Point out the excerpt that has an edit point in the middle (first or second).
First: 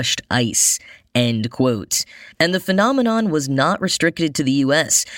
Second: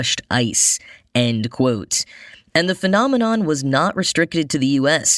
first